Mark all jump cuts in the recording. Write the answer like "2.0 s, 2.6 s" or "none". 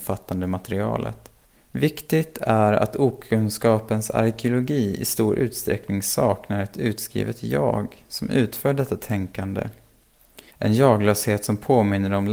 1.4 s, 10.5 s